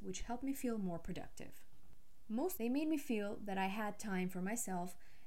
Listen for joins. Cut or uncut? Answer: cut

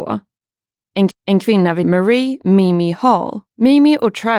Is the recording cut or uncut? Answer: cut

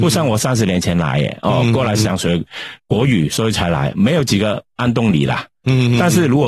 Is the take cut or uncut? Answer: uncut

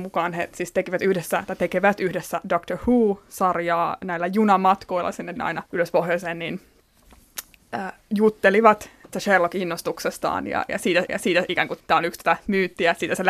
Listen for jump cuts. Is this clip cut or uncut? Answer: cut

